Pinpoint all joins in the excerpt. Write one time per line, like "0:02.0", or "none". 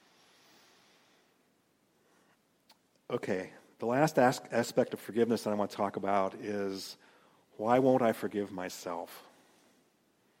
none